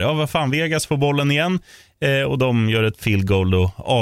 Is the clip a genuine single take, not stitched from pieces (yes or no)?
yes